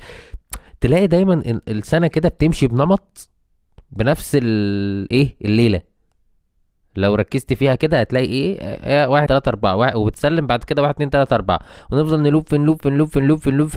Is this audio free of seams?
no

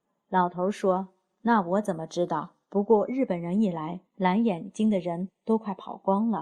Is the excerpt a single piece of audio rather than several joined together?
no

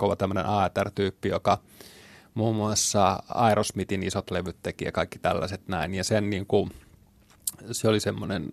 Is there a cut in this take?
no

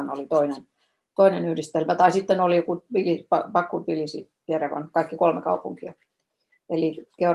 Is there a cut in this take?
no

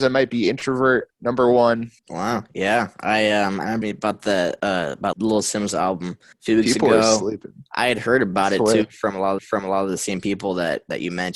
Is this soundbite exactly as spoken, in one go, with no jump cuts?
no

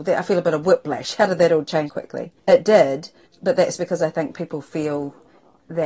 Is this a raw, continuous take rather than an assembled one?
no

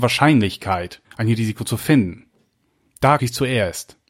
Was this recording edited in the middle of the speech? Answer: yes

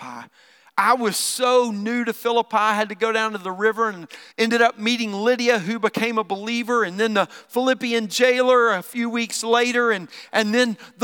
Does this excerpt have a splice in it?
yes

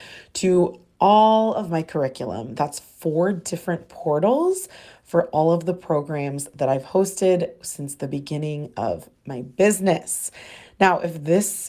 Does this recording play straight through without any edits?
yes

